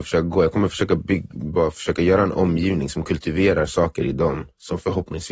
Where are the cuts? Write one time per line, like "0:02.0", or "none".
none